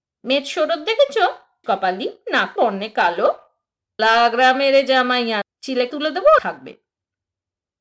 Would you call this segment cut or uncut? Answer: cut